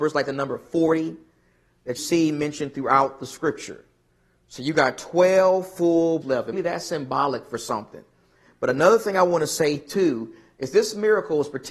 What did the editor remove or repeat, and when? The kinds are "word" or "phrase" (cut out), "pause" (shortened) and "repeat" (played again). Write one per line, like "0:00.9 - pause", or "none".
0:02.0 - word
0:06.2 - word
0:06.5 - word